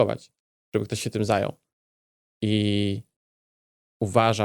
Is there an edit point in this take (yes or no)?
no